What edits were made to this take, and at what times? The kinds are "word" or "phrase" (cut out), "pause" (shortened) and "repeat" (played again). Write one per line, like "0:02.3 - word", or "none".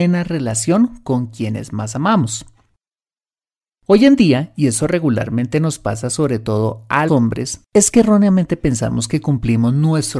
0:07.1 - word
0:07.7 - pause

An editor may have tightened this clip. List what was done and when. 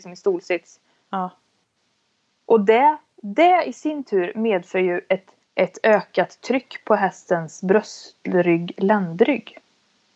0:05.4 - pause

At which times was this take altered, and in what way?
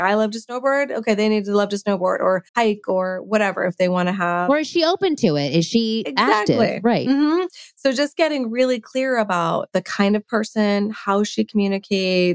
0:02.5 - pause

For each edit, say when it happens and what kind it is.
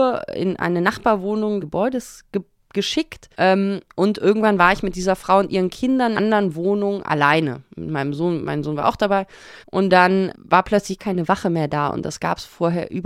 0:01.6 - word
0:03.3 - pause
0:06.1 - phrase
0:09.6 - pause
0:10.3 - word
0:11.0 - word

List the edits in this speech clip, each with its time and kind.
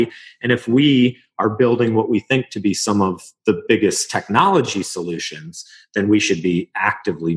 none

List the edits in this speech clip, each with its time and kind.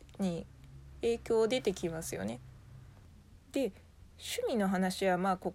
0:03.4 - pause

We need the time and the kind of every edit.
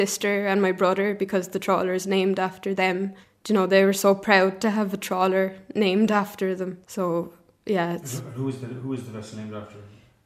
0:03.2 - pause
0:06.8 - pause

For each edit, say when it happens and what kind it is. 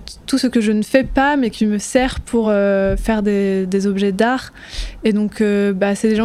none

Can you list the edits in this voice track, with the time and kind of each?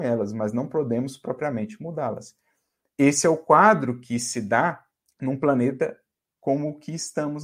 0:05.1 - pause

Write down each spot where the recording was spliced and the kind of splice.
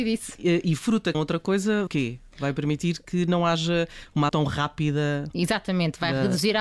0:01.1 - word
0:01.9 - phrase
0:04.3 - word

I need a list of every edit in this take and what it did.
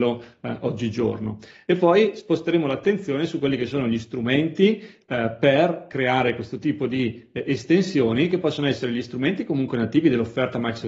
none

